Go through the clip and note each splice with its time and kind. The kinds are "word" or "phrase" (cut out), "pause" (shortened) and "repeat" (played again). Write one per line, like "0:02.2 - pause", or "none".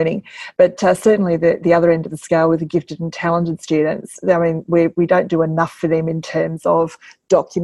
none